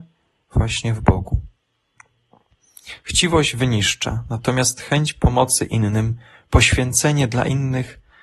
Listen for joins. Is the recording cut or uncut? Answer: uncut